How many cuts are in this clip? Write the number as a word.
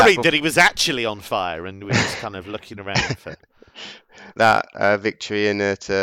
one